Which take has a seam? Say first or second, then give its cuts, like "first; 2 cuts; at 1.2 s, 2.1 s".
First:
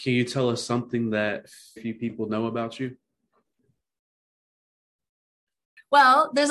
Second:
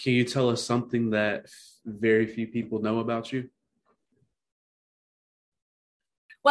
first; 1 cut; at 1.8 s